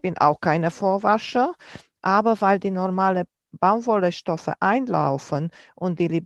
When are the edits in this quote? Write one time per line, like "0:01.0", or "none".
none